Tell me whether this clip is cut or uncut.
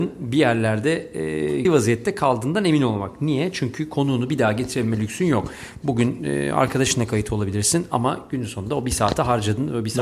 cut